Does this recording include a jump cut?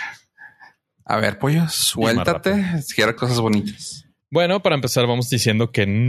yes; 1 cut; at 3.2 s

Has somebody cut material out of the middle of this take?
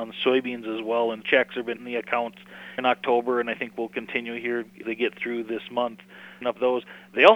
yes; 5 cuts; at 1.2 s, 1.8 s, 2.8 s, 4.8 s, 6.4 s

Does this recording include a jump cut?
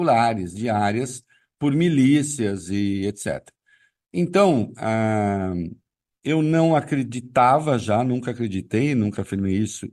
no; 0 cuts

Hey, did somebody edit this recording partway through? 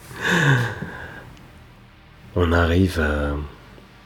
no; 0 cuts

